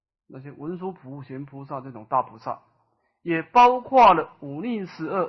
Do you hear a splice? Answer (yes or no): no